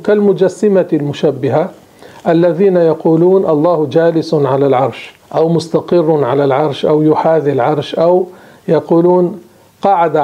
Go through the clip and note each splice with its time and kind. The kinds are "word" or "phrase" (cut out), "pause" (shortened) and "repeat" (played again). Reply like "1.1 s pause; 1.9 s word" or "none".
5.2 s pause